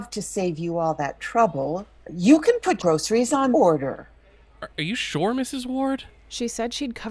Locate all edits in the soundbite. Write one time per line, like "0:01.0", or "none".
0:02.0
0:02.8
0:03.5
0:04.7